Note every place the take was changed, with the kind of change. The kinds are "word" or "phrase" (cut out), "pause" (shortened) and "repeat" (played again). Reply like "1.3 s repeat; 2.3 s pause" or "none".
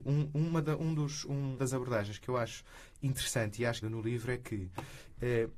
1.6 s word; 3.8 s phrase